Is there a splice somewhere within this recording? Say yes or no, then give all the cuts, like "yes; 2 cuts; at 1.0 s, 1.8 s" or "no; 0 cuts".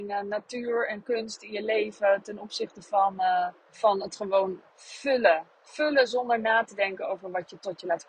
yes; 2 cuts; at 3.6 s, 4.7 s